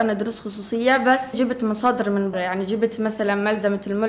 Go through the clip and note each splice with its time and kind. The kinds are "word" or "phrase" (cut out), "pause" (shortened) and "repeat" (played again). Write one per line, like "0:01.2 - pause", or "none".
0:01.3 - word
0:02.3 - word